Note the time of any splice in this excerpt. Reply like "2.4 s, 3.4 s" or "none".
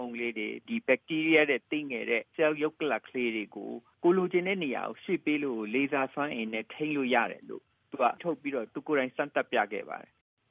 8.2 s